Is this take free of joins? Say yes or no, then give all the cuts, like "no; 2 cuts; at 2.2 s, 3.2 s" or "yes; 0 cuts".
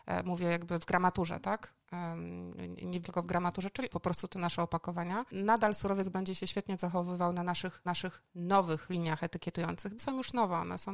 no; 4 cuts; at 3.0 s, 3.9 s, 7.9 s, 10.0 s